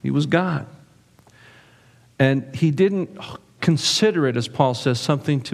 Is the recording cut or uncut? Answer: uncut